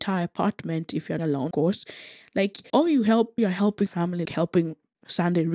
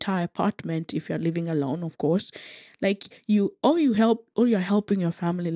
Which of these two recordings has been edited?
first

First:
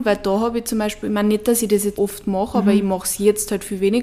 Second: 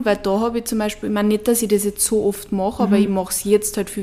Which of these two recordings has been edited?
first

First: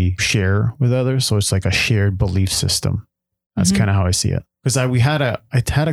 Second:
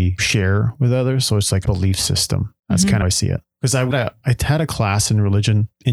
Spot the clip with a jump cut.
second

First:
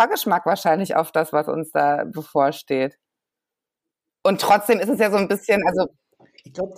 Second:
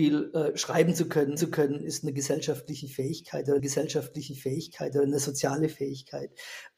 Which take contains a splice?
second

